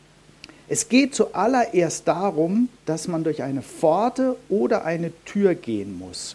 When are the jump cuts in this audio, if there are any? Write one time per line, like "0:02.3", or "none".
0:02.8